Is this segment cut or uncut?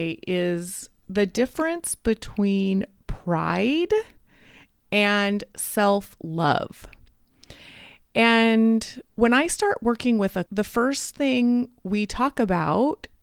cut